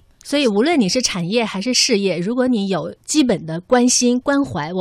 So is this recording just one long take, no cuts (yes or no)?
no